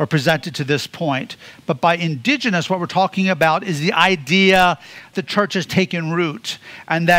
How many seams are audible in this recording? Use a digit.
1